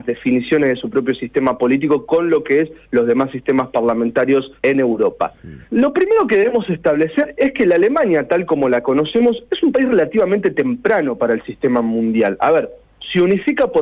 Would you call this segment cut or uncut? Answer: cut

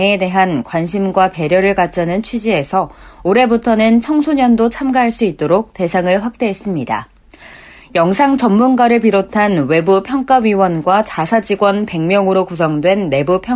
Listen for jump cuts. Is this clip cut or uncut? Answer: uncut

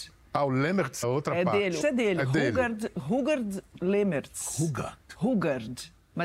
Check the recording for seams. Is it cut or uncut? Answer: cut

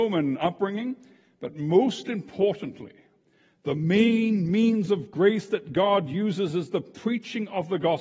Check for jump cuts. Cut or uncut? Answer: uncut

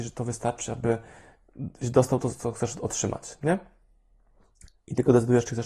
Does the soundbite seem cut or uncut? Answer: uncut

